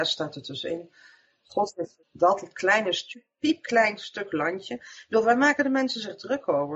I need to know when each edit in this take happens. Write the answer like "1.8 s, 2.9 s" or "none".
2.0 s